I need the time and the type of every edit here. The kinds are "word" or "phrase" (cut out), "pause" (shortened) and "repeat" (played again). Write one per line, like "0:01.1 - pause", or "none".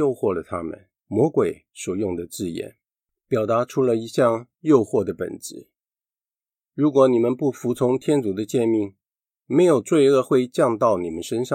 0:01.0 - pause
0:04.5 - pause